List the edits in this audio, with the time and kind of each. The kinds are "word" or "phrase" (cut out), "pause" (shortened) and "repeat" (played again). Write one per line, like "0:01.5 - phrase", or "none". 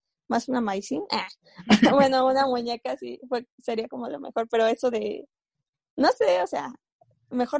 none